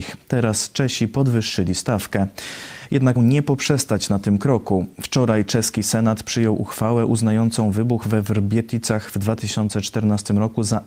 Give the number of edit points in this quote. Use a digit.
1